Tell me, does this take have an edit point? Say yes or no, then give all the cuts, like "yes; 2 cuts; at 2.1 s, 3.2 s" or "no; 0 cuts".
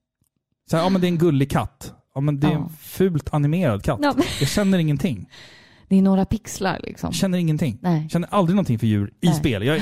no; 0 cuts